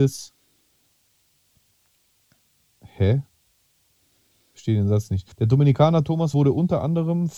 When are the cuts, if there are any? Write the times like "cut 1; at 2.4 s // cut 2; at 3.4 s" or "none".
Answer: cut 1; at 5.3 s // cut 2; at 6.3 s